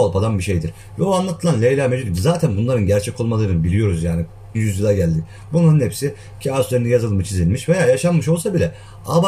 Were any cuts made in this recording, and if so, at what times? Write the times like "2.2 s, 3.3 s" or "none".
4.5 s